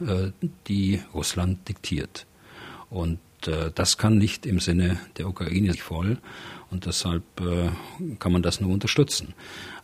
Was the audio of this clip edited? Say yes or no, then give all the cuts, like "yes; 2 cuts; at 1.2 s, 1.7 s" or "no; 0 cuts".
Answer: yes; 1 cut; at 5.7 s